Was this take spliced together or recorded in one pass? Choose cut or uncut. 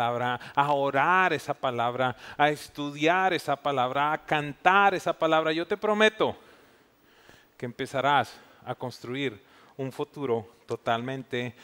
uncut